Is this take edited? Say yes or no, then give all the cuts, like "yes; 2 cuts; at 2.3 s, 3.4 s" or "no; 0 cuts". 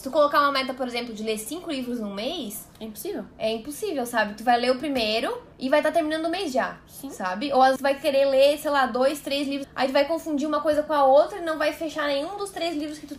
yes; 3 cuts; at 5.5 s, 7.8 s, 9.6 s